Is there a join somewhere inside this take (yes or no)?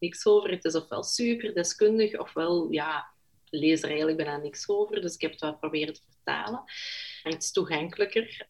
yes